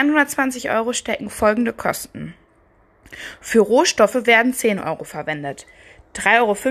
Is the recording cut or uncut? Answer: uncut